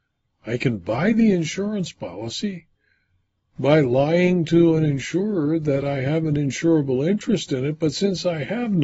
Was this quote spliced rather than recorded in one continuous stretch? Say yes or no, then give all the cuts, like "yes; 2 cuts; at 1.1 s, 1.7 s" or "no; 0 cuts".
no; 0 cuts